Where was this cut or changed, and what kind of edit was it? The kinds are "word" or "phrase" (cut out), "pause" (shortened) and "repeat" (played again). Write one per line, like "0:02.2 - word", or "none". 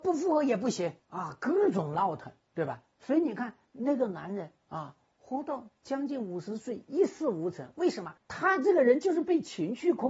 0:01.0 - pause
0:02.4 - pause
0:04.6 - pause
0:08.2 - pause